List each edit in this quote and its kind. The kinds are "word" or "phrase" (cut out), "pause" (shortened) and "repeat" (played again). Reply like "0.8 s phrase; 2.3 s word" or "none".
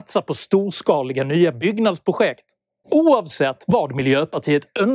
none